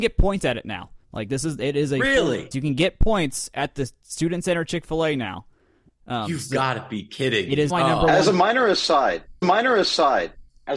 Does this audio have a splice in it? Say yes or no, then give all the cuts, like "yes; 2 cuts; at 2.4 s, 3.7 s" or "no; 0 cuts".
yes; 4 cuts; at 1.0 s, 2.5 s, 7.7 s, 9.4 s